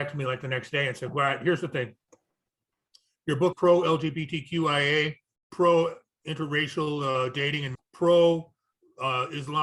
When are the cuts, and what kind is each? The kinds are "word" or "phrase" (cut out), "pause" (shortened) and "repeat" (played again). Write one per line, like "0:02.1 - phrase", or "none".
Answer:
0:03.5 - word
0:07.7 - word